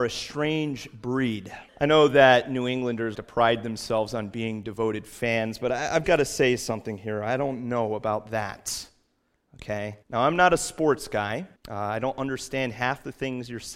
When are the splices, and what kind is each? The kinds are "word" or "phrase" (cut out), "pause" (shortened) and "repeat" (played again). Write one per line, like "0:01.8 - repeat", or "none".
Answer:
0:01.7 - pause
0:03.1 - word
0:06.0 - word
0:10.0 - pause
0:11.6 - pause